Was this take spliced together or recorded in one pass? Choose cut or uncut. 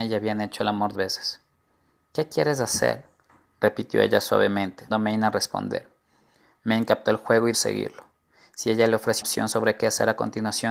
cut